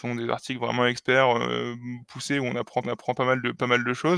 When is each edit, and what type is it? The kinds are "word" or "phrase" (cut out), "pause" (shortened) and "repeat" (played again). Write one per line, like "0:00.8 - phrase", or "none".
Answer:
0:02.8 - repeat